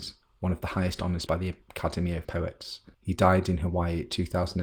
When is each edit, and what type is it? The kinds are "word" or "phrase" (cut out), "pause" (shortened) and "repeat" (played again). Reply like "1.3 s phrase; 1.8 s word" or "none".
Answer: 1.3 s word; 2.2 s word; 2.9 s pause